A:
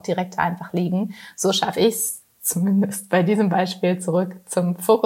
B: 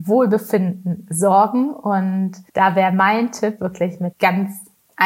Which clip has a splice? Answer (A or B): B